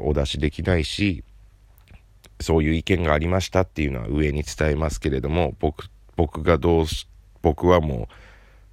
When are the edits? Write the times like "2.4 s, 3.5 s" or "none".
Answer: none